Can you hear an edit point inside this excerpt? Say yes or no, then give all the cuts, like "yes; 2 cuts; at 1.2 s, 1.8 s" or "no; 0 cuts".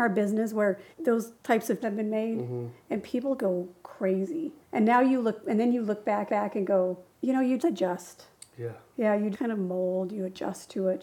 yes; 8 cuts; at 0.9 s, 1.8 s, 3.4 s, 4.6 s, 6.3 s, 7.1 s, 7.6 s, 9.3 s